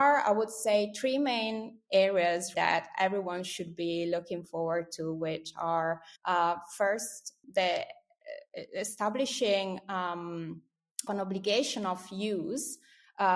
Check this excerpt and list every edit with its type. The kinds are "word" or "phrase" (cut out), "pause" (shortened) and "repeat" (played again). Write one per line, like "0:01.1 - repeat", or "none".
0:02.5 - word
0:06.2 - pause
0:07.4 - word
0:11.1 - word